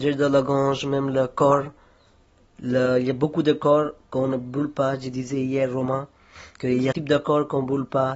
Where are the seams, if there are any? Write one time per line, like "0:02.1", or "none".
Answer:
0:06.5
0:06.9